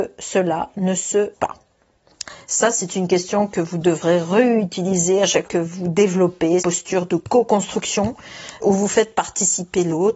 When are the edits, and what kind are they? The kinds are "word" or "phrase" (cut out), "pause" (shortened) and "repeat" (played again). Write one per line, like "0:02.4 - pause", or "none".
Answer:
0:01.3 - word
0:05.4 - word
0:06.6 - word
0:08.6 - word